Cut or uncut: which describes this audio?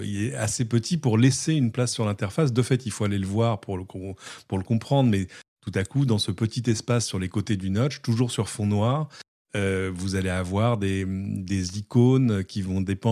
uncut